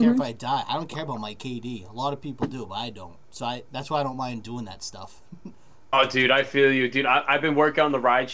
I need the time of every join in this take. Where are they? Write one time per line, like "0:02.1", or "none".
none